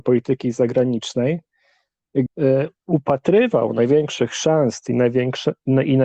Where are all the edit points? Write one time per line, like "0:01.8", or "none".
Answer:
0:02.3
0:02.8